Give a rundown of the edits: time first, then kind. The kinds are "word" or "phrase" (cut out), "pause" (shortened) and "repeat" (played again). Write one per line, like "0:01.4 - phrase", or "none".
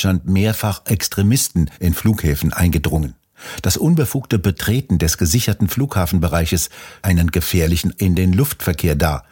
0:01.7 - pause
0:07.0 - word
0:07.9 - word